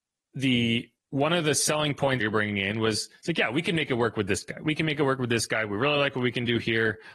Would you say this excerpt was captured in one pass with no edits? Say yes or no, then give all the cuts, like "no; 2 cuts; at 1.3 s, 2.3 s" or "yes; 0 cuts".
no; 3 cuts; at 1.0 s, 2.2 s, 3.2 s